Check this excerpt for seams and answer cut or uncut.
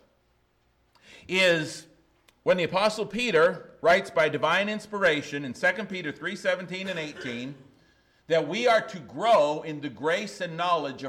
uncut